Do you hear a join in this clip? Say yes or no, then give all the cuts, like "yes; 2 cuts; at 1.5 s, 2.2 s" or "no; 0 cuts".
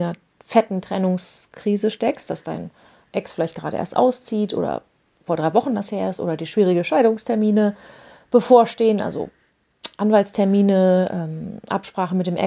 no; 0 cuts